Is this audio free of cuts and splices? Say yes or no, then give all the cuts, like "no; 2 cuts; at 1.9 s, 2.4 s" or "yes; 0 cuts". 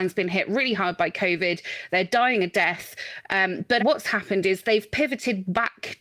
no; 1 cut; at 3.8 s